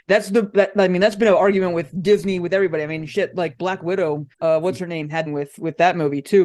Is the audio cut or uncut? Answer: cut